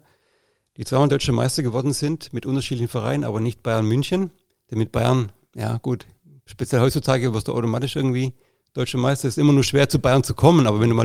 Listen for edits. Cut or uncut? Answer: uncut